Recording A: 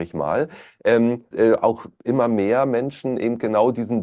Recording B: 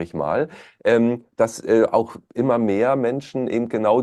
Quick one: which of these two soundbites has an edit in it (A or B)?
A